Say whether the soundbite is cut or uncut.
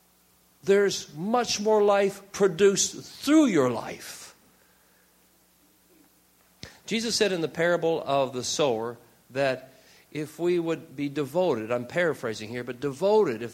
uncut